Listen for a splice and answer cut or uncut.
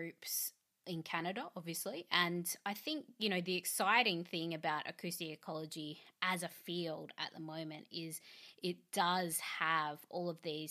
uncut